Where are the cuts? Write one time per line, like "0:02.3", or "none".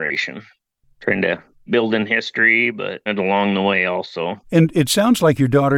0:01.7
0:03.1
0:04.4